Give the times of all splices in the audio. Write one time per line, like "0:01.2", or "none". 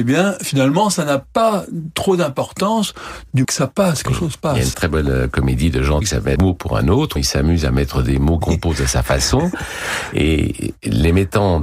0:03.4
0:04.1
0:04.7
0:06.0
0:06.4
0:07.2
0:08.4